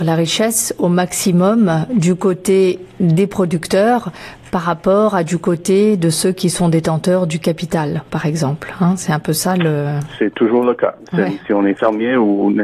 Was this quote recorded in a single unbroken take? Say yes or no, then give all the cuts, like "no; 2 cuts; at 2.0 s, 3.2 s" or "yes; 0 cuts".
yes; 0 cuts